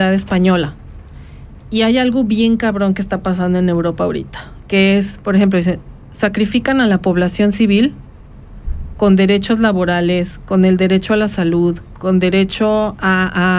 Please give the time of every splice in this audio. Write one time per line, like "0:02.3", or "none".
none